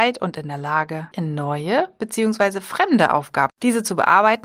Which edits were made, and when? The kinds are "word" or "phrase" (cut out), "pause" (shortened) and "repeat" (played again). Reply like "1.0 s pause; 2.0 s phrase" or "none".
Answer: 1.1 s word; 3.5 s word